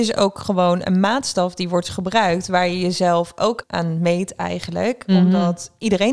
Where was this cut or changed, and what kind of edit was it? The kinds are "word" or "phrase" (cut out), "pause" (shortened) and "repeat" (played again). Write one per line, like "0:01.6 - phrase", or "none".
0:03.6 - word